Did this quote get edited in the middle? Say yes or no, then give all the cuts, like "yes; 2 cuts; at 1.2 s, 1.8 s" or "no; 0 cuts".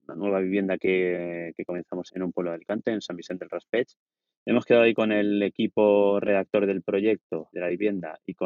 yes; 2 cuts; at 2.1 s, 7.5 s